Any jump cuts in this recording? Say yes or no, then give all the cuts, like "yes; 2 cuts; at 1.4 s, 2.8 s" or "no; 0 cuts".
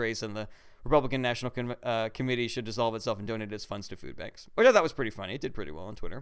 no; 0 cuts